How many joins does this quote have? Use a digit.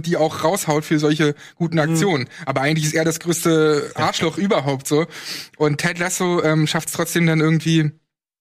0